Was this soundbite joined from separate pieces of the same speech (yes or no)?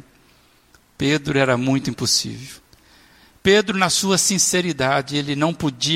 no